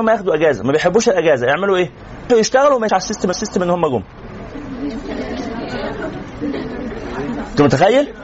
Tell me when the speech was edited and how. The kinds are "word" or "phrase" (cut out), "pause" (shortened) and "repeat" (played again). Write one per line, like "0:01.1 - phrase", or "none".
0:02.3 - phrase
0:02.9 - word
0:03.3 - repeat